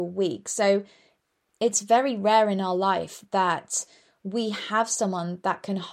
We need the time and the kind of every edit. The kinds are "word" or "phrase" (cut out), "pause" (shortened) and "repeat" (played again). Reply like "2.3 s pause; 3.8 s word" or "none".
none